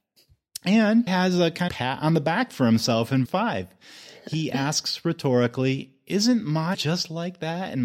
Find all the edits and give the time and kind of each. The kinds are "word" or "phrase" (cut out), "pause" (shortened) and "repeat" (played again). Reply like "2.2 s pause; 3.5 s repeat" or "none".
1.1 s word; 1.7 s word; 3.2 s word; 6.7 s word